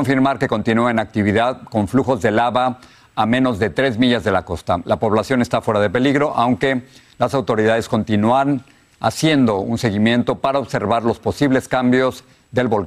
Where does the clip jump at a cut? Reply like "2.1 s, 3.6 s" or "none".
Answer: none